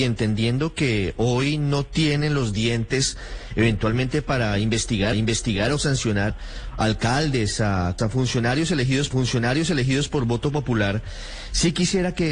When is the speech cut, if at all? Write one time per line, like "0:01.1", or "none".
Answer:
0:05.1
0:06.3
0:08.0
0:09.1